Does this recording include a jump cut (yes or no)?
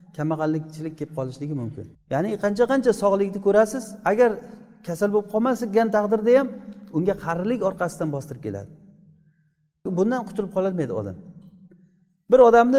yes